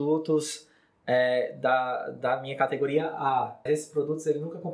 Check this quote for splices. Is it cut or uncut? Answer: cut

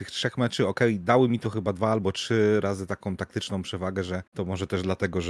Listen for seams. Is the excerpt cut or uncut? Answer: cut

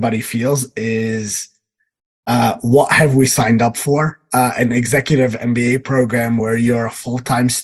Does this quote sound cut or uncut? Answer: uncut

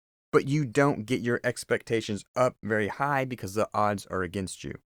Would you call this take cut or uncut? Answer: uncut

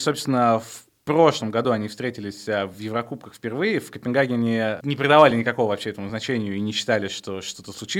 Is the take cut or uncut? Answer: uncut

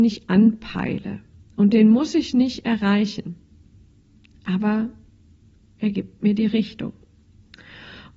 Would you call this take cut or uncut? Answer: uncut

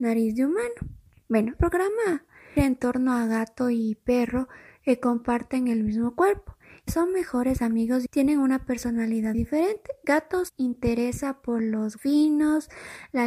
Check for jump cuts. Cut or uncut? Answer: cut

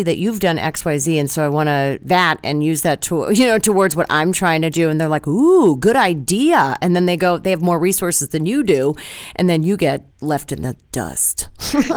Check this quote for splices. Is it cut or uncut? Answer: cut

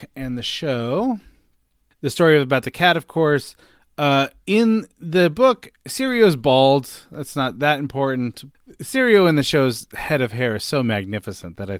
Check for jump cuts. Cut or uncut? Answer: uncut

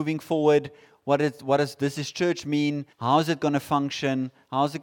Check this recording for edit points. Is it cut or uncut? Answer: cut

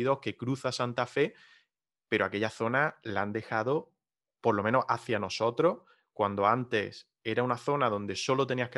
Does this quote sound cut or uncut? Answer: uncut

